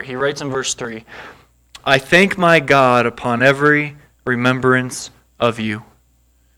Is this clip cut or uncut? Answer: uncut